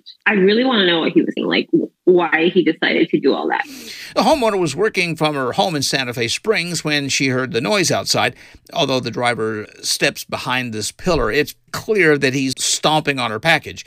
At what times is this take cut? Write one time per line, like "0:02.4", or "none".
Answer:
0:01.4
0:09.6
0:11.7
0:12.5